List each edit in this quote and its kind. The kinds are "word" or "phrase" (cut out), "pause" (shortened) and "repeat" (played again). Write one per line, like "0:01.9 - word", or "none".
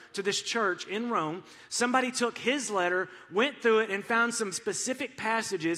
0:04.5 - word

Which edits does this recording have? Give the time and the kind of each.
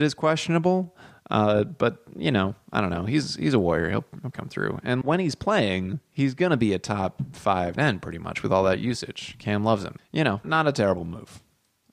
0:04.3 - word
0:05.0 - word
0:07.8 - word
0:10.0 - word
0:10.4 - word

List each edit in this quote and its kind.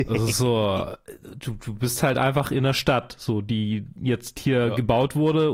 none

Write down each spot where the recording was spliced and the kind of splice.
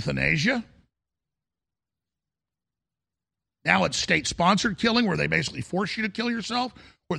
none

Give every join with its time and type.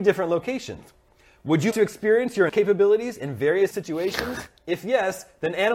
0:01.7 - word
0:02.5 - word
0:03.7 - word

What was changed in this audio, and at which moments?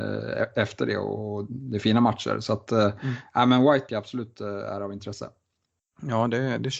0:03.9 - word

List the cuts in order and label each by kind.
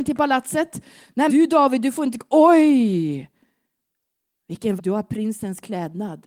0:01.3 - word
0:04.8 - word

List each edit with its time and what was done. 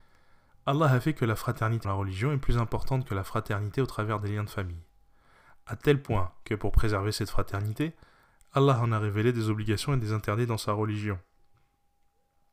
0:01.8 - word

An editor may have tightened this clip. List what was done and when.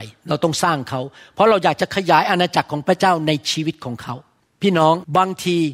none

